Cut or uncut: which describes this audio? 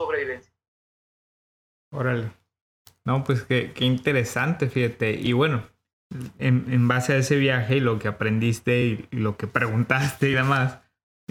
uncut